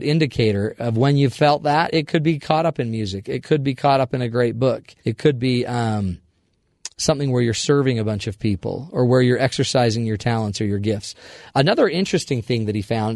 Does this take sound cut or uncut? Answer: cut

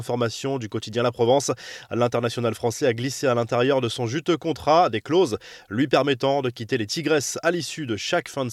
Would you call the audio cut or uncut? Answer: uncut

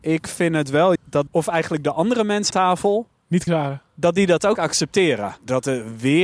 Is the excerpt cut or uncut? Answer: cut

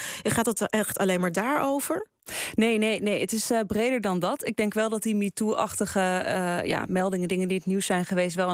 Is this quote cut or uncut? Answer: uncut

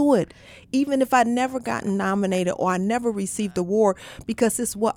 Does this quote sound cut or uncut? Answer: uncut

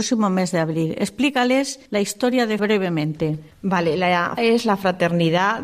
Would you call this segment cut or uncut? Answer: cut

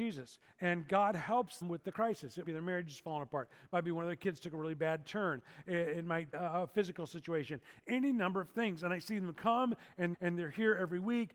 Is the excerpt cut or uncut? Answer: cut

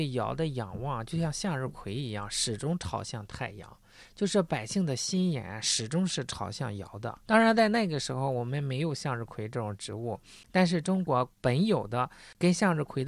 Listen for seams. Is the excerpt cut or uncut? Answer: cut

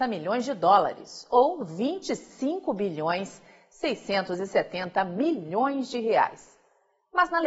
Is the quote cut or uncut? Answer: uncut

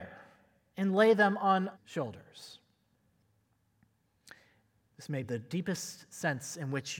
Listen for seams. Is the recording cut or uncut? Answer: cut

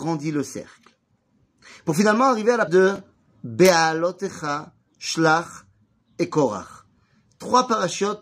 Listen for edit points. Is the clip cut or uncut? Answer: cut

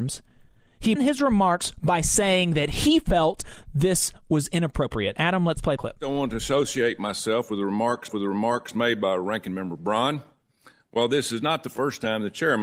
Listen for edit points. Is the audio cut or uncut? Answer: cut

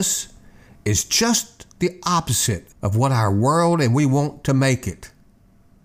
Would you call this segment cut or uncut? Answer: cut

